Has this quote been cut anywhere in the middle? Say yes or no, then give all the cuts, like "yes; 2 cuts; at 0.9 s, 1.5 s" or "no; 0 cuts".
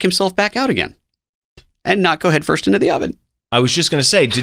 no; 0 cuts